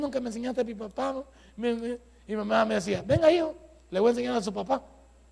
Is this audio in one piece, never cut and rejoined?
yes; 0 cuts

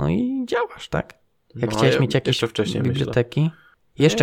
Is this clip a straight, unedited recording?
yes; 0 cuts

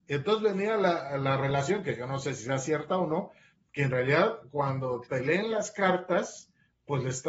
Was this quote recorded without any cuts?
yes; 0 cuts

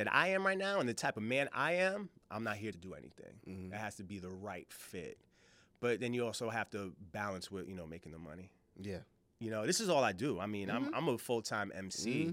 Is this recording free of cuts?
no; 1 cut; at 2.7 s

